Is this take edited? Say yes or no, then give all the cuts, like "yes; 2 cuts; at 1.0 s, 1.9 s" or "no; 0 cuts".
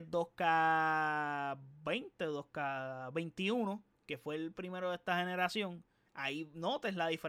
yes; 1 cut; at 6.0 s